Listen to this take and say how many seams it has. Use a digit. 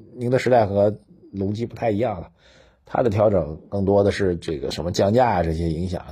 0